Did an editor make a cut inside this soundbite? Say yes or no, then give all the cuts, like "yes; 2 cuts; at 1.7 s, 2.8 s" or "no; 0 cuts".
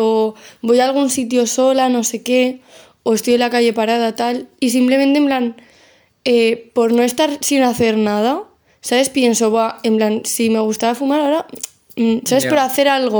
no; 0 cuts